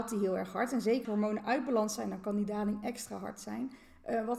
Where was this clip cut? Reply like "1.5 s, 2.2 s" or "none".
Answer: 1.0 s